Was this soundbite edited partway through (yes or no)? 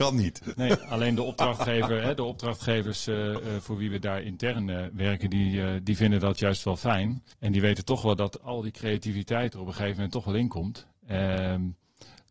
yes